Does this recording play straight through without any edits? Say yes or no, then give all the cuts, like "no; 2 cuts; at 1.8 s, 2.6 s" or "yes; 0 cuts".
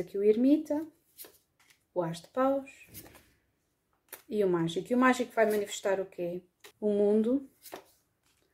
no; 2 cuts; at 1.6 s, 6.7 s